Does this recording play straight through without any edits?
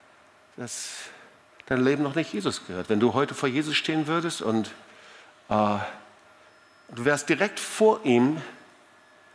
yes; 0 cuts

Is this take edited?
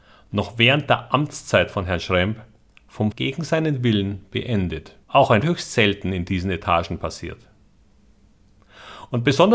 yes; 3 cuts; at 3.1 s, 5.0 s, 5.4 s

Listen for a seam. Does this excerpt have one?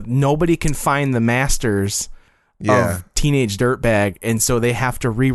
no; 0 cuts

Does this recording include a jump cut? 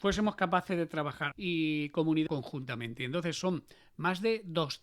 yes; 2 cuts; at 1.3 s, 2.3 s

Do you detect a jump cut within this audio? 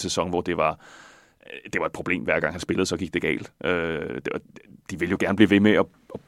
no; 0 cuts

